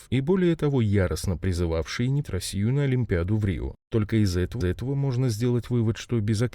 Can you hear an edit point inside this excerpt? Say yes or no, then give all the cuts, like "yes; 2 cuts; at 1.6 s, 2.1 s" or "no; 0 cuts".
yes; 2 cuts; at 2.2 s, 4.6 s